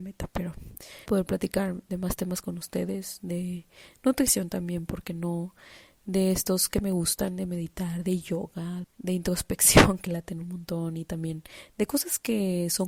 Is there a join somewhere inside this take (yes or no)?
yes